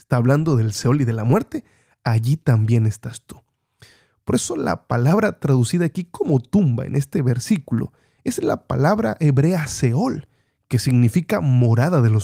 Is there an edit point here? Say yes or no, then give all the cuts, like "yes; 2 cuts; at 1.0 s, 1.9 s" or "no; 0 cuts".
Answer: no; 0 cuts